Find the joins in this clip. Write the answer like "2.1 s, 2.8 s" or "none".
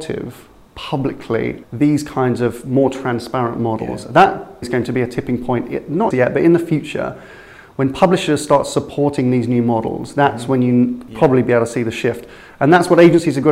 1.6 s, 4.6 s, 6.1 s